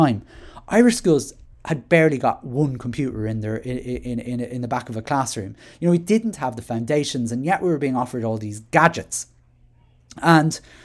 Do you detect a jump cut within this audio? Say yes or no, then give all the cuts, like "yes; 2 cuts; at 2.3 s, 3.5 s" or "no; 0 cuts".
no; 0 cuts